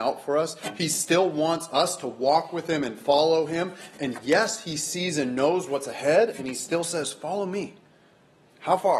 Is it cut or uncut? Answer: uncut